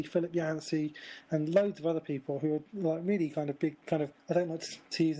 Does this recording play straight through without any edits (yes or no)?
no